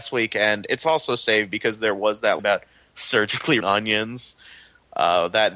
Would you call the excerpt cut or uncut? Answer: cut